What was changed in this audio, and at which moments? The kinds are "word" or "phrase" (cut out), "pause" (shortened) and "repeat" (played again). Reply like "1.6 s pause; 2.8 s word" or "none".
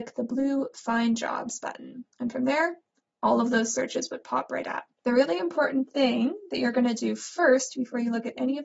4.9 s pause